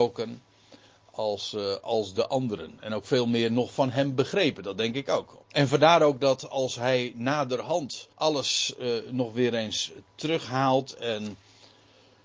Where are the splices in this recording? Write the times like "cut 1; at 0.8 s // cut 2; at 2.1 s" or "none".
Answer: cut 1; at 5.4 s // cut 2; at 8.1 s